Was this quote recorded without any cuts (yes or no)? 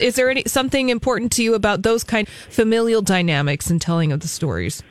no